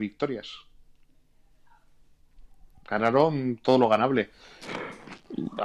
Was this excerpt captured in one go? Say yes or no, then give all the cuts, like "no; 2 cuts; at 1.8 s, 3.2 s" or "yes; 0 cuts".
yes; 0 cuts